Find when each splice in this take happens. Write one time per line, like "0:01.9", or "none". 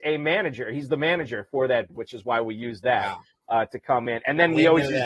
0:01.9

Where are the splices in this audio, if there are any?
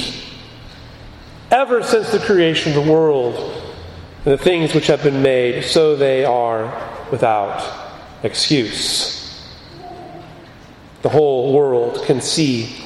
0:10.8

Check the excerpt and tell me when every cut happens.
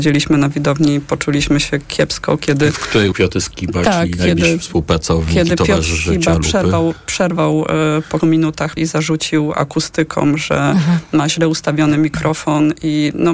0:03.1
0:08.2
0:08.8

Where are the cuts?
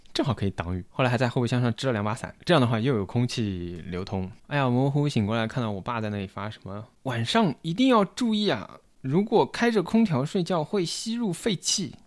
0:00.9

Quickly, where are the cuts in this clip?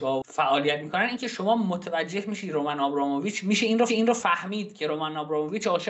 0:03.9

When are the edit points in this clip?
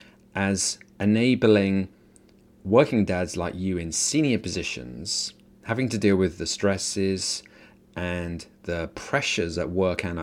none

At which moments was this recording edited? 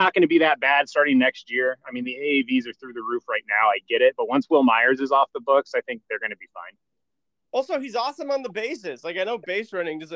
none

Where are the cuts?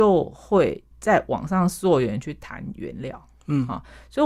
0:00.9

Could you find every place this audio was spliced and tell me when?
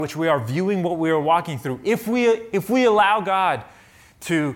none

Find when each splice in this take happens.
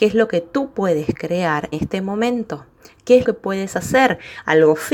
0:01.7
0:03.2

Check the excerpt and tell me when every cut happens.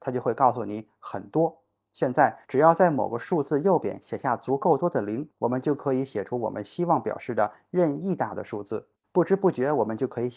0:02.4
0:05.3
0:09.0

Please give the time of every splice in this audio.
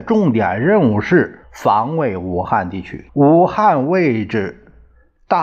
0:01.4
0:03.1

